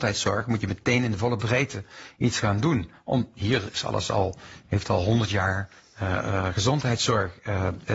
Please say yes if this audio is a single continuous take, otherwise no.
yes